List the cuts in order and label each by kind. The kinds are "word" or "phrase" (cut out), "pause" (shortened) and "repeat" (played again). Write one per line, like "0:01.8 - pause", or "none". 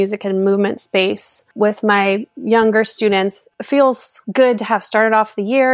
0:01.5 - pause
0:03.5 - pause
0:04.2 - pause